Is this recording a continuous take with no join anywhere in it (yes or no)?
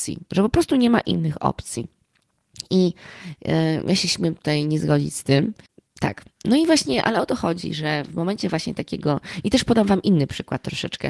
yes